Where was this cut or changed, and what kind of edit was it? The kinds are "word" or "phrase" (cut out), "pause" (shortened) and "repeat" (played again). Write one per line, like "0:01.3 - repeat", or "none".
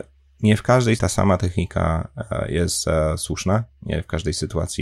0:01.0 - word